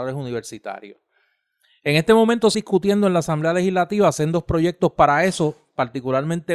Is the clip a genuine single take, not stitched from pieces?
no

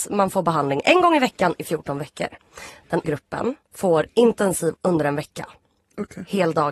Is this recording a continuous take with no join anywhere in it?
no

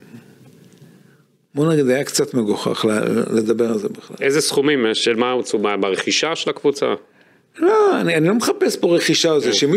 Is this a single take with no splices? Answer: yes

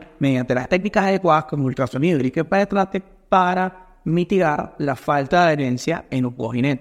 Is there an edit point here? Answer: no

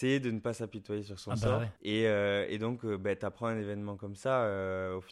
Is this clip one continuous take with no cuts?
no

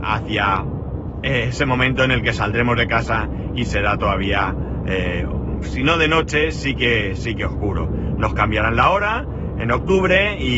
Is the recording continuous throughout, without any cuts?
yes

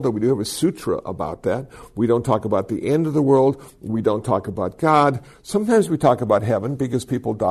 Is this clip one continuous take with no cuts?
yes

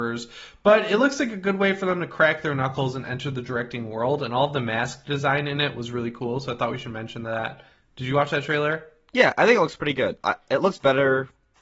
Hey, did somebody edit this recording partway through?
yes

